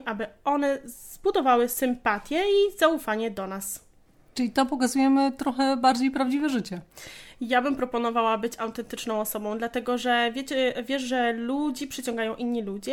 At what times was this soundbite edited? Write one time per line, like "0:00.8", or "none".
none